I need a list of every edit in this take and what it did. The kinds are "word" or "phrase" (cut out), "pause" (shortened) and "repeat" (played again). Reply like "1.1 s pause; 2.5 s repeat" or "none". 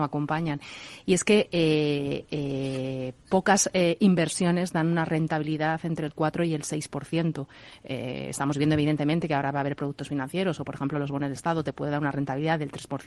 none